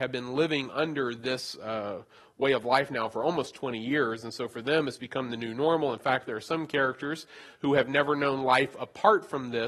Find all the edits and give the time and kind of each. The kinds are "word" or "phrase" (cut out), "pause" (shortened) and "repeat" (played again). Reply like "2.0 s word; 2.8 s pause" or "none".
none

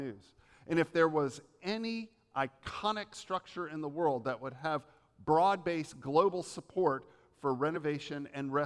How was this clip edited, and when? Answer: none

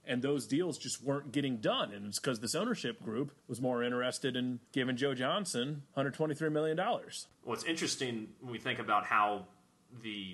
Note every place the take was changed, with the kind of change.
3.4 s pause; 4.7 s pause; 5.9 s pause; 7.3 s pause

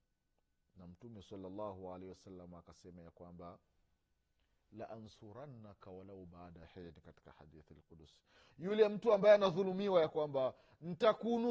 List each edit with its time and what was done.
none

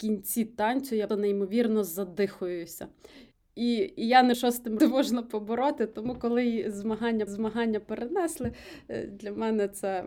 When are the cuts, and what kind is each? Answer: 1.1 s word; 3.3 s pause; 4.3 s word; 4.8 s phrase; 7.3 s repeat

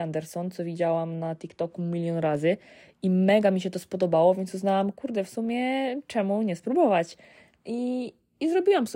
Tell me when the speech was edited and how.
none

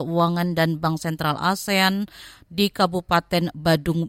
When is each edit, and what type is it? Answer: none

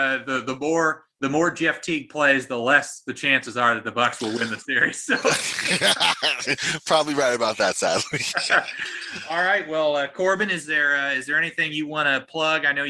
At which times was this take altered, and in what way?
1.1 s pause

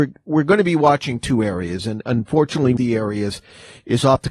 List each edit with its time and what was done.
2.8 s phrase

